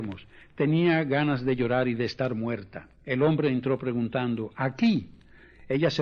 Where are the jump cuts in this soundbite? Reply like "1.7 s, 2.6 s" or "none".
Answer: 3.0 s